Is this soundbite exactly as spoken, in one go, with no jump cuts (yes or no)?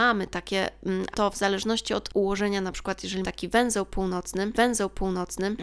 no